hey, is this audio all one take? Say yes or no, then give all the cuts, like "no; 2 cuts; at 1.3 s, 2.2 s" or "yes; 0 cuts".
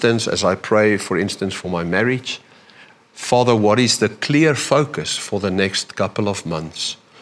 yes; 0 cuts